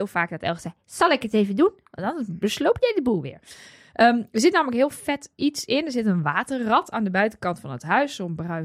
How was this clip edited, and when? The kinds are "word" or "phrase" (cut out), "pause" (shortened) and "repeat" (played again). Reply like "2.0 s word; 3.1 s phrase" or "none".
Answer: none